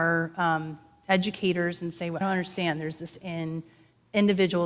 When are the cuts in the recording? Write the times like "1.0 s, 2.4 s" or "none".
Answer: 2.2 s, 3.2 s